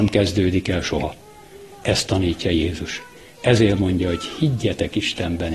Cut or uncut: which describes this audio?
uncut